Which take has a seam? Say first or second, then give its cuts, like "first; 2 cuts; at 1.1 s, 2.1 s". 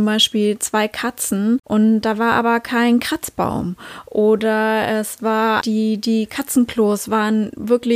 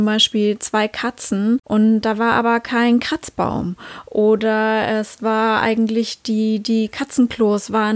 first; 1 cut; at 5.6 s